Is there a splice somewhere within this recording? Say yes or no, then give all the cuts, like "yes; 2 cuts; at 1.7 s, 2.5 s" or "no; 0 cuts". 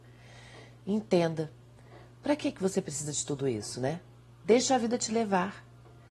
no; 0 cuts